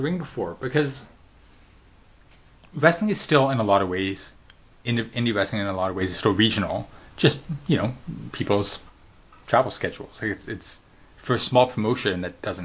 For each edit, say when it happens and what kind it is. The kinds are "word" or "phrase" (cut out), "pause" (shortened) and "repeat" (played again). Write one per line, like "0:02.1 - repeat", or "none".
none